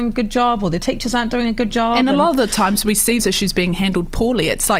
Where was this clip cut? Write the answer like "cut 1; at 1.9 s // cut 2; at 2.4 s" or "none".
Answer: cut 1; at 3.2 s